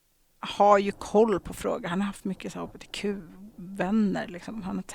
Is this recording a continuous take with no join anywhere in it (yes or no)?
yes